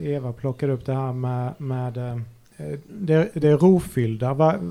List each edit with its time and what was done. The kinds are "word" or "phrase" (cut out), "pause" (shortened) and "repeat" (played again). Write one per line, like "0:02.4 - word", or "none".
none